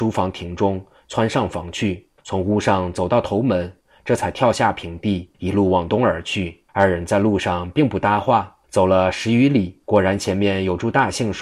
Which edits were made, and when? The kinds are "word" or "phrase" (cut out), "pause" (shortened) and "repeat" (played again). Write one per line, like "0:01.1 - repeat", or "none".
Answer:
0:02.2 - pause
0:05.3 - pause
0:06.7 - pause
0:08.6 - pause
0:09.8 - pause